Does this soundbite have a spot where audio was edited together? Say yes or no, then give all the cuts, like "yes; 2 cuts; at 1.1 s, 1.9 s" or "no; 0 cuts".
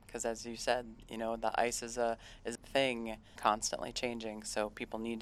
yes; 2 cuts; at 2.6 s, 3.4 s